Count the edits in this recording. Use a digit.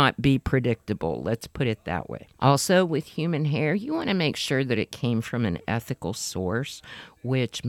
1